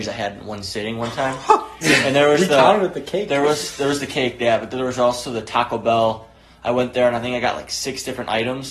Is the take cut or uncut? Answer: uncut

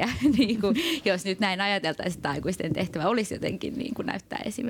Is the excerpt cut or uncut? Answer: uncut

